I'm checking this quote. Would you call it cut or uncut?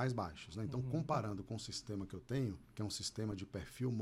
cut